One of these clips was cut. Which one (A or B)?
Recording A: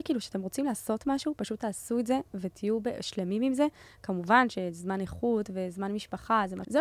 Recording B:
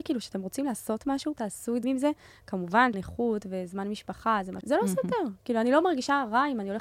B